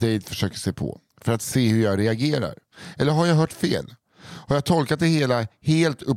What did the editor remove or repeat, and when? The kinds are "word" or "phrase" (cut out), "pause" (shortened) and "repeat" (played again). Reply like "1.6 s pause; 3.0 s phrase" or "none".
1.1 s pause